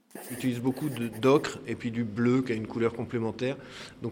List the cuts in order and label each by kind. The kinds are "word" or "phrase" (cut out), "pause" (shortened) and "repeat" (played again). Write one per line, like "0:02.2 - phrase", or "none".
none